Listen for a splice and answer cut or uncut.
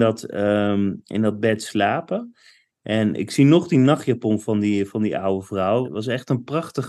cut